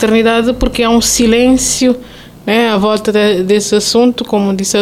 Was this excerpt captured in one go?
yes; 0 cuts

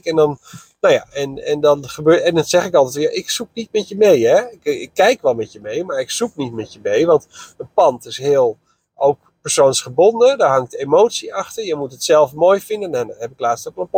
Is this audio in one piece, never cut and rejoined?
yes; 0 cuts

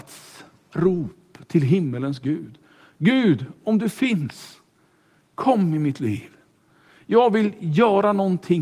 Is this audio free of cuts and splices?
yes; 0 cuts

